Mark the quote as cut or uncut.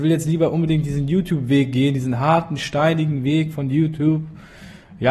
uncut